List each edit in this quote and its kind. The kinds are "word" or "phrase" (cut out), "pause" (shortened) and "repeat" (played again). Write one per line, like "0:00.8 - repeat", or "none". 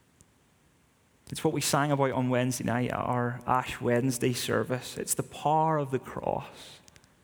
none